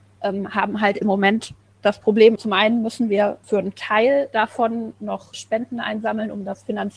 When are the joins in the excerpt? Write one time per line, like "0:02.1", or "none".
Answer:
0:02.4